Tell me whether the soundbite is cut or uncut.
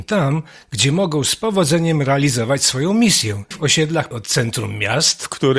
cut